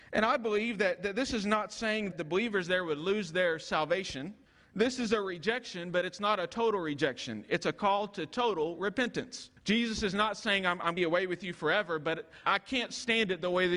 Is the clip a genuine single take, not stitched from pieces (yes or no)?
no